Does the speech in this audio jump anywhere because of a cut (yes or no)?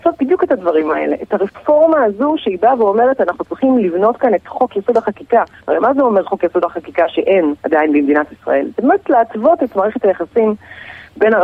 yes